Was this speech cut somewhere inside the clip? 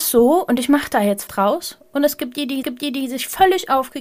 yes; 2 cuts; at 1.3 s, 2.6 s

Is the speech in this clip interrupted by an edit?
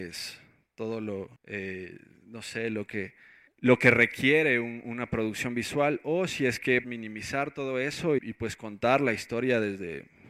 yes; 4 cuts; at 1.4 s, 3.5 s, 6.8 s, 8.2 s

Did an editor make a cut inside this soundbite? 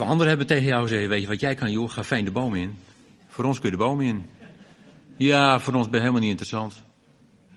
no; 0 cuts

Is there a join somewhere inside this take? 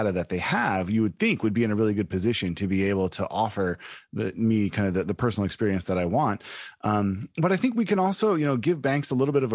no; 0 cuts

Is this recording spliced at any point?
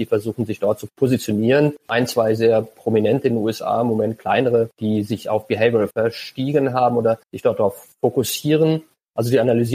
yes; 2 cuts; at 5.9 s, 7.2 s

